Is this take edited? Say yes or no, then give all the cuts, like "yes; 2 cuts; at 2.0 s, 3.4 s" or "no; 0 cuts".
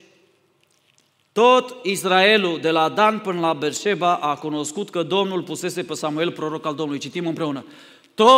no; 0 cuts